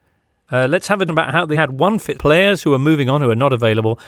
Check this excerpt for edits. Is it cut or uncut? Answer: cut